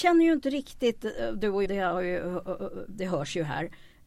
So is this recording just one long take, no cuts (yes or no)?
no